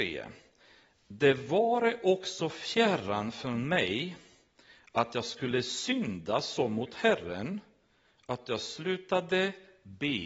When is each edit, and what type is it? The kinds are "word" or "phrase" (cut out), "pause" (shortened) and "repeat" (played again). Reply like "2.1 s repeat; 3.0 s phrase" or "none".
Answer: none